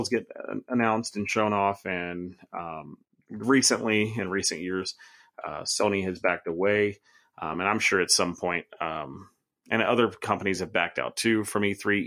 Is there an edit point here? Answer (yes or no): no